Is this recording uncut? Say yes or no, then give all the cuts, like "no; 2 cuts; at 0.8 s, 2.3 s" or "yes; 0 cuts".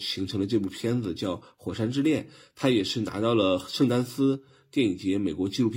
yes; 0 cuts